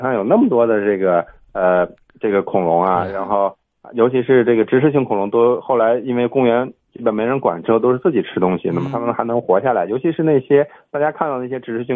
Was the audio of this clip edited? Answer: no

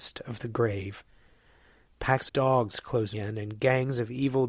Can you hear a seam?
yes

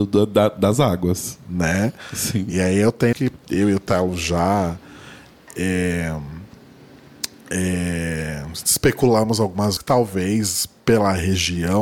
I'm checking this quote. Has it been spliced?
yes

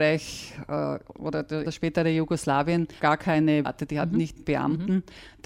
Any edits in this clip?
yes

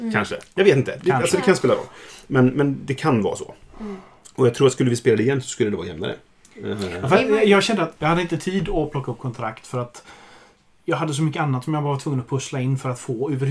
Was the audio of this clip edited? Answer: no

